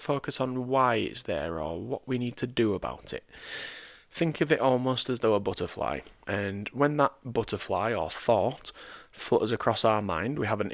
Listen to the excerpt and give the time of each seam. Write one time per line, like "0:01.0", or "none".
0:06.2